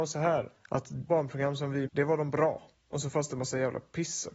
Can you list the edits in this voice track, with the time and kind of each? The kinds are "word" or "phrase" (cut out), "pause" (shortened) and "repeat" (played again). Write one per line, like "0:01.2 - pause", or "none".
0:01.1 - word
0:01.9 - word